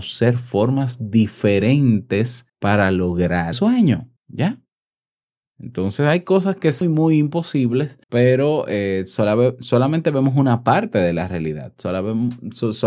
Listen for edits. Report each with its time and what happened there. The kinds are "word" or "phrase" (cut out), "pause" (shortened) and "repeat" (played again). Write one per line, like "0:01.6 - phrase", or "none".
0:02.5 - pause
0:03.5 - word
0:04.2 - pause
0:06.8 - phrase
0:08.0 - pause